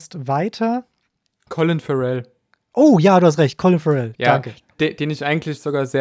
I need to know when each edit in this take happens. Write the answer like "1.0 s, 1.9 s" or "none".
none